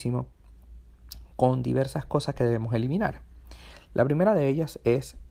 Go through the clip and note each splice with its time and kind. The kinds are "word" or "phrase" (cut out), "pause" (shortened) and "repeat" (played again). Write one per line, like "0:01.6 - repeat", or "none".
none